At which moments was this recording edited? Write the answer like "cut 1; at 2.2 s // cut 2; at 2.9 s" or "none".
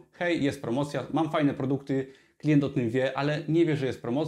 none